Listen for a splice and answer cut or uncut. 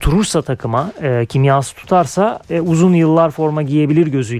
cut